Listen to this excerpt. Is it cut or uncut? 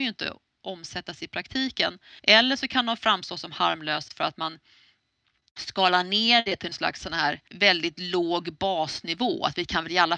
cut